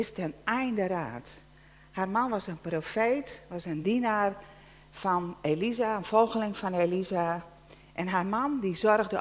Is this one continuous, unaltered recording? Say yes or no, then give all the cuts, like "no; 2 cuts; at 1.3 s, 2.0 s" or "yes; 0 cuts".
yes; 0 cuts